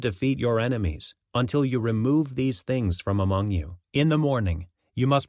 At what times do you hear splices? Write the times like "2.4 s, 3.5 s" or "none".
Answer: 1.2 s, 3.8 s